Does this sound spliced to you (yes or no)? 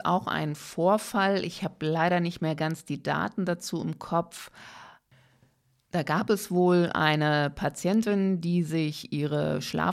no